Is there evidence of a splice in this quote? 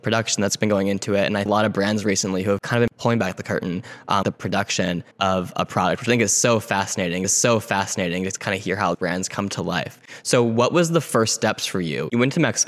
yes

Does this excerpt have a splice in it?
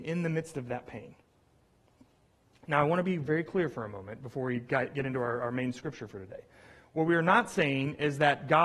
no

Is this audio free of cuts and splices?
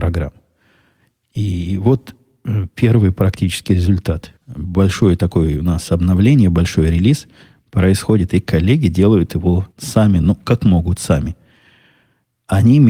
no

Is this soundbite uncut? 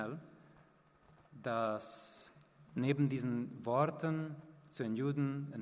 yes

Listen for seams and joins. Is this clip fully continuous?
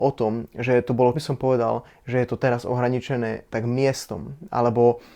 no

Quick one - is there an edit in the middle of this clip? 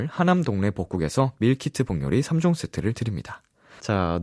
no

